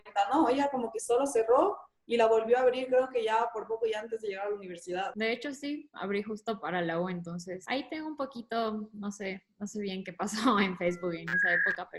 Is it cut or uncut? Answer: uncut